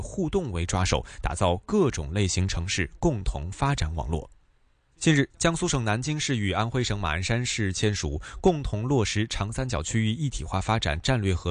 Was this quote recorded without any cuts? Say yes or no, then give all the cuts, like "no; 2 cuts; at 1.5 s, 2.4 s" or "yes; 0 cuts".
yes; 0 cuts